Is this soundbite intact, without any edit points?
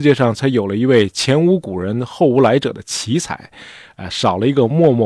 yes; 0 cuts

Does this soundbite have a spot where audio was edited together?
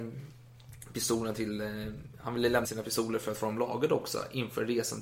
yes; 1 cut; at 2.6 s

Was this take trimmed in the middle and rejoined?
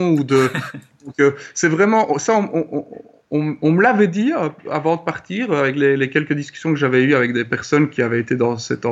no; 0 cuts

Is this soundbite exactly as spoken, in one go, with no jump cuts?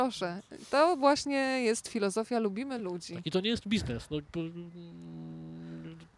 yes; 0 cuts

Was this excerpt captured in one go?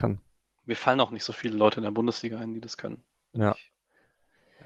yes; 0 cuts

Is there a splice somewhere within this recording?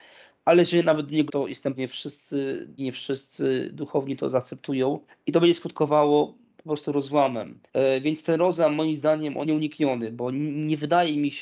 yes; 6 cuts; at 1.3 s, 1.8 s, 2.8 s, 5.1 s, 7.7 s, 9.4 s

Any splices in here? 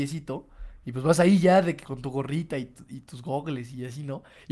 yes; 1 cut; at 1.8 s

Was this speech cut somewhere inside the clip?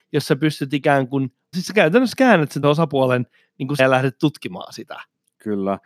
yes; 3 cuts; at 1.5 s, 2.6 s, 3.8 s

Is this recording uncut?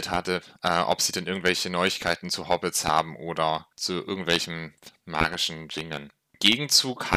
yes; 0 cuts

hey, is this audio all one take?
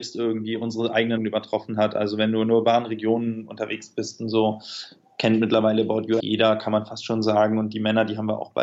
no; 2 cuts; at 1.2 s, 6.2 s

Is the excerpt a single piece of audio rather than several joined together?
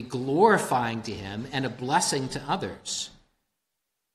yes; 0 cuts

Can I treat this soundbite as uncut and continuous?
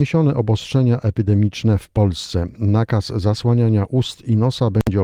yes; 0 cuts

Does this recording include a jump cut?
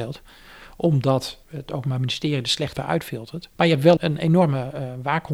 yes; 4 cuts; at 1.4 s, 2.8 s, 3.5 s, 4.0 s

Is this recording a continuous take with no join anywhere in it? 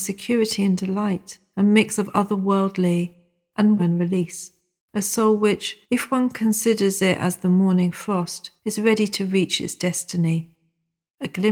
no; 4 cuts; at 3.8 s, 4.8 s, 5.8 s, 8.6 s

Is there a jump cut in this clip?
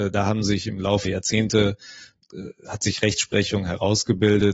yes; 1 cut; at 1.0 s

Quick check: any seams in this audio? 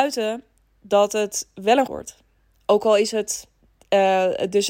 yes; 2 cuts; at 1.9 s, 3.6 s

